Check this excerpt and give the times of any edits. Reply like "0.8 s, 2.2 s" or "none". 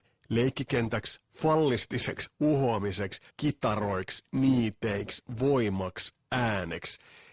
3.3 s